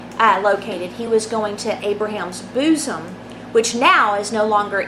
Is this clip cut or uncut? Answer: uncut